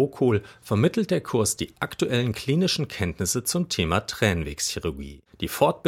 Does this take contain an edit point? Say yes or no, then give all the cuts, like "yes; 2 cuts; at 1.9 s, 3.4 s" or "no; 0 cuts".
no; 0 cuts